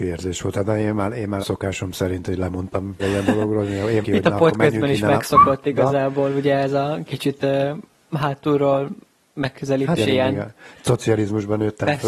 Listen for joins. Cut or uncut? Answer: cut